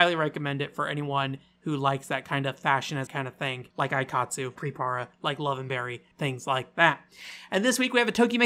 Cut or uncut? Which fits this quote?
cut